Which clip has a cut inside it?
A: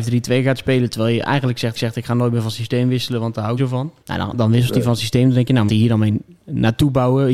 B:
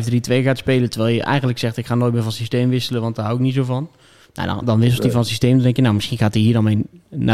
A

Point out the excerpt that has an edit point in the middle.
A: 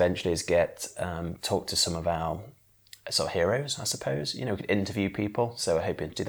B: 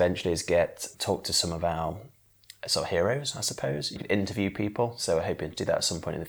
B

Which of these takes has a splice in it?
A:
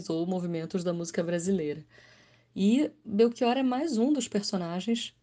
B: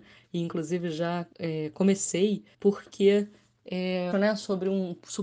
B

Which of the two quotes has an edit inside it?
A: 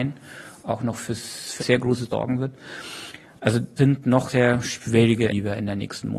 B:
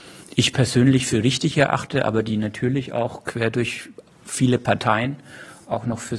A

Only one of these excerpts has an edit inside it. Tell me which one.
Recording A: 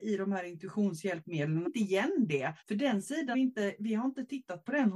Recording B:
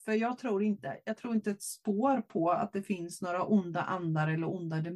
A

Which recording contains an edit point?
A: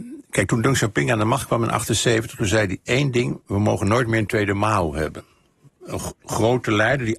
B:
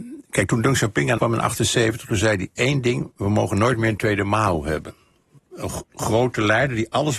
B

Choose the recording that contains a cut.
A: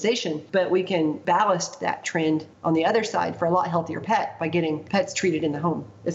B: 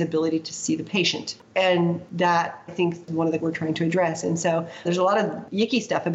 B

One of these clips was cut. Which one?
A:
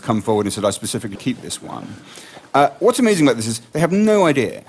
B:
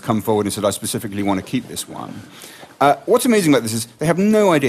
A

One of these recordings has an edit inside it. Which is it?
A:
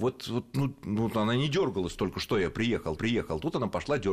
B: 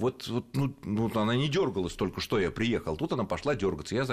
A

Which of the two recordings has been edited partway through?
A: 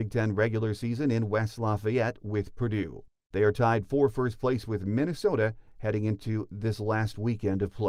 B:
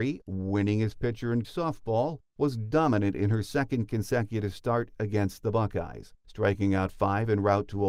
B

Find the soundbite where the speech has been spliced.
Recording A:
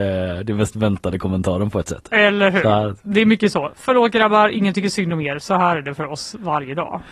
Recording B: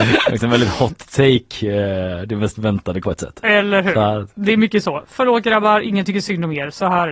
B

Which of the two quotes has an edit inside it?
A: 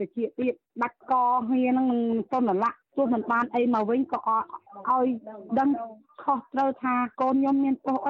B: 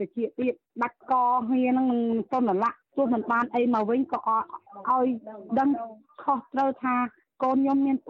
A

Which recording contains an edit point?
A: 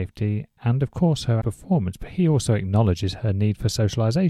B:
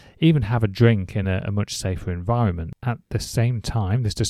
A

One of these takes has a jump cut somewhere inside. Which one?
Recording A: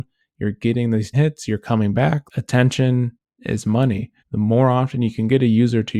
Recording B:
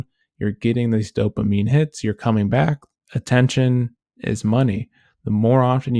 A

